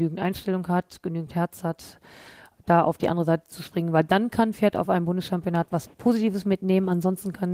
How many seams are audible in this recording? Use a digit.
0